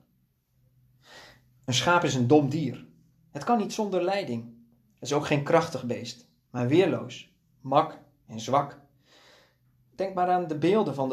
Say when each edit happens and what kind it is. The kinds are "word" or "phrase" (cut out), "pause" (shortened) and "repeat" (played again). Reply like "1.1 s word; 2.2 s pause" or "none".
none